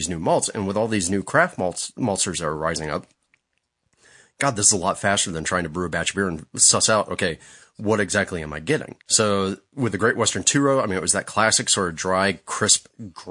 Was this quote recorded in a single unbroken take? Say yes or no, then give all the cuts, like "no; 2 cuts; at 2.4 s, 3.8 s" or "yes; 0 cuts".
no; 1 cut; at 9.0 s